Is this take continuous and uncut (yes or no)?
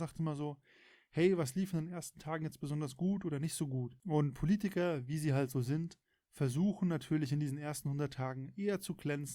yes